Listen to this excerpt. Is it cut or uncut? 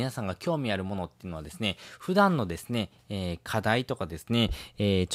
uncut